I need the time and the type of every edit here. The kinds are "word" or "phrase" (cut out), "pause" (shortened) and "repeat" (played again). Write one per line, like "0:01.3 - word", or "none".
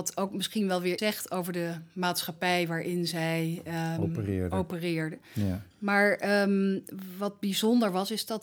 0:01.0 - word
0:05.7 - pause